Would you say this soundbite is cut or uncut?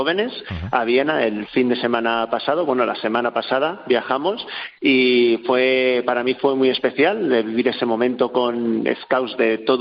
uncut